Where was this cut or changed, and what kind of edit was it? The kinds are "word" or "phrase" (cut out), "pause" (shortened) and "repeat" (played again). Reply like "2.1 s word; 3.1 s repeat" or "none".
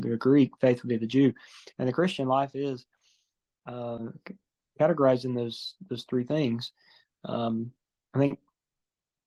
none